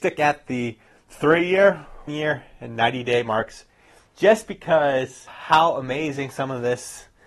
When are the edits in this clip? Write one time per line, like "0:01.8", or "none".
0:02.1